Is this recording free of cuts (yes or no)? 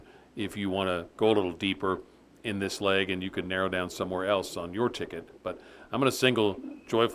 yes